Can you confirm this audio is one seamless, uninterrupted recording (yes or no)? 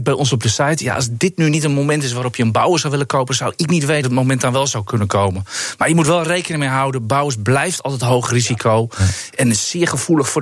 no